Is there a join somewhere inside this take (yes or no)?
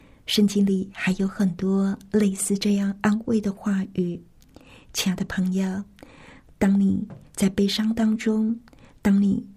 no